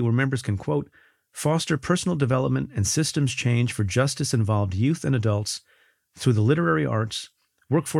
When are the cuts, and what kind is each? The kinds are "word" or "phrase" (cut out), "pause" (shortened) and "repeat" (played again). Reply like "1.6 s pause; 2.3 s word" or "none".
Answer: none